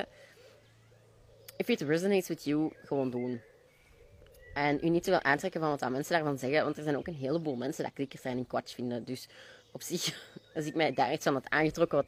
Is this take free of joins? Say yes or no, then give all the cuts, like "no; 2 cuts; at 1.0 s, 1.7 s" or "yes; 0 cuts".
no; 1 cut; at 9.6 s